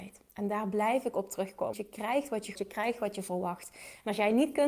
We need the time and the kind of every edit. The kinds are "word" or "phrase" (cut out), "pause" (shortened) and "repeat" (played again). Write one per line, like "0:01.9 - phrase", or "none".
0:01.7 - word
0:02.5 - word